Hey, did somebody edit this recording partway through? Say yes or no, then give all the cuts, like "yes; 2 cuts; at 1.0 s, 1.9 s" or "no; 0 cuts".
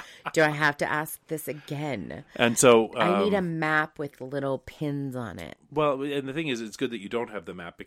yes; 1 cut; at 4.1 s